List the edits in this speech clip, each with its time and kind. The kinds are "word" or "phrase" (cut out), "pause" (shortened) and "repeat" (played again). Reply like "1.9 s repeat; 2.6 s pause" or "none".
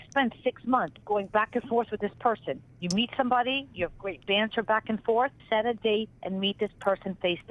1.0 s pause; 2.7 s pause; 5.4 s pause

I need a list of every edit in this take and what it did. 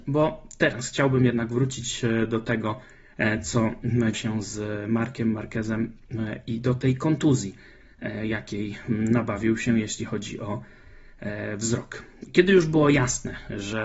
4.1 s word

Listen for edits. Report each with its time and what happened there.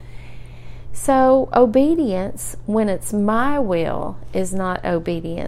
none

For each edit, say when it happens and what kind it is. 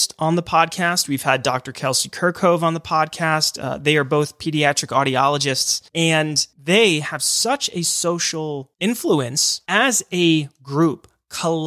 5.9 s pause

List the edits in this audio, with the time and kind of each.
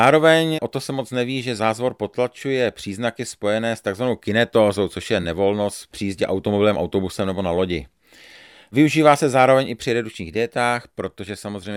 none

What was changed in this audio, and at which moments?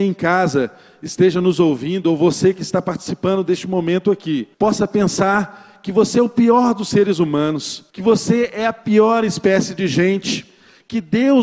4.5 s pause; 7.9 s pause

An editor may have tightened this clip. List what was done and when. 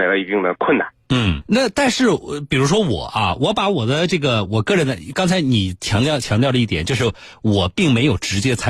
1.4 s word

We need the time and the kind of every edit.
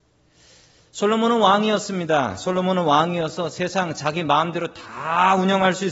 none

